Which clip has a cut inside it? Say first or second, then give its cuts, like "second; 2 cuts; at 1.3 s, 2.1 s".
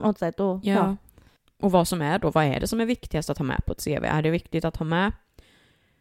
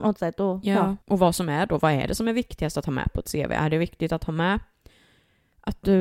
second; 1 cut; at 1.0 s